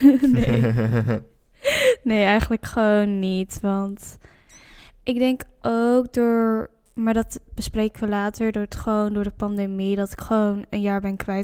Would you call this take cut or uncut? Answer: uncut